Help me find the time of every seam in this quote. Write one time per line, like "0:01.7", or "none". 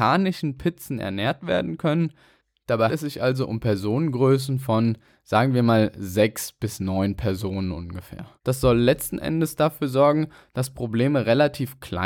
0:02.9
0:08.4

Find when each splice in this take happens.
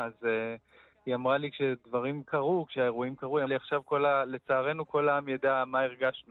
0:03.5

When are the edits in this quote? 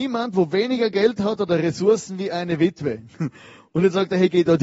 none

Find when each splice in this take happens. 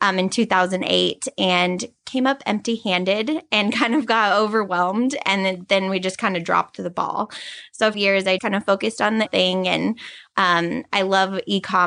0:07.9
0:08.4
0:09.3

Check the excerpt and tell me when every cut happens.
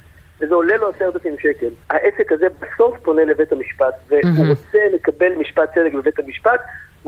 0:01.8

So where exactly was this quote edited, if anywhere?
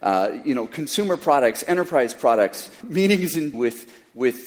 0:02.8
0:03.5

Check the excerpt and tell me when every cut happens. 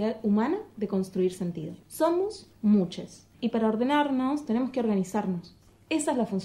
0:01.8
0:03.3

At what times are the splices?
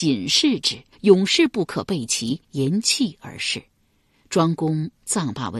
0:00.9
0:02.4
0:03.7

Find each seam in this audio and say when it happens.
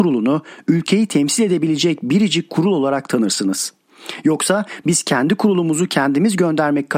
none

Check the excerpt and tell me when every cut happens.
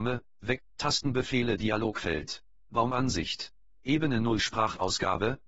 none

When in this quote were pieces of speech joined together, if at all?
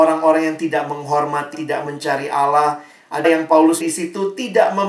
0:01.5
0:01.8
0:03.2
0:03.8

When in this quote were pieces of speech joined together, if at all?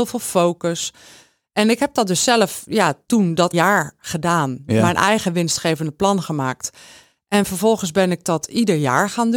0:03.5

